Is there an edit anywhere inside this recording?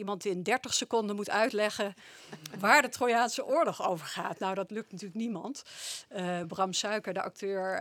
no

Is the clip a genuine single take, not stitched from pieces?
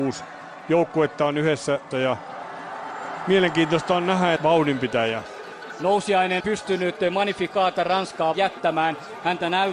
no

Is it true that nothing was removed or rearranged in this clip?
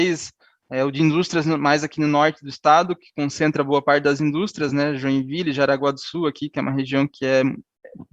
yes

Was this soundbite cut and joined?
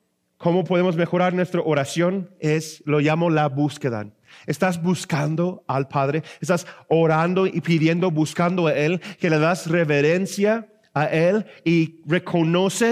no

